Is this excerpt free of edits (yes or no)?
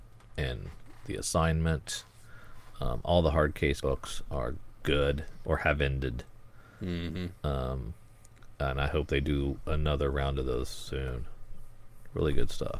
no